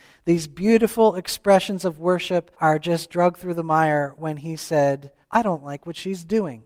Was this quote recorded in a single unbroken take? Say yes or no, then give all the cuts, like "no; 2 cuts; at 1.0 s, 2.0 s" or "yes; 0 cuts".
no; 2 cuts; at 2.5 s, 5.2 s